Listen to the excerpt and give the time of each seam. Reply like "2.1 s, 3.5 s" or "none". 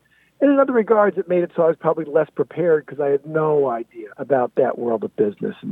4.1 s